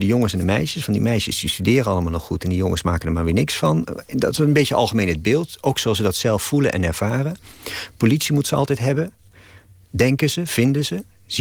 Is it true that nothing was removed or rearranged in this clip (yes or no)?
yes